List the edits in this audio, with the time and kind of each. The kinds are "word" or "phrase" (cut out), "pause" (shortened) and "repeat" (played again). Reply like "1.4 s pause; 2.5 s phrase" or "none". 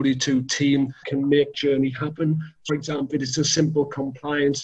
1.0 s word; 1.5 s word; 2.7 s word; 3.1 s word